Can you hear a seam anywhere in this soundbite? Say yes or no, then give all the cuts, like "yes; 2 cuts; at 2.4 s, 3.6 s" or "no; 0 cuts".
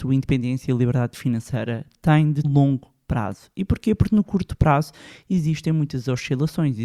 yes; 1 cut; at 2.4 s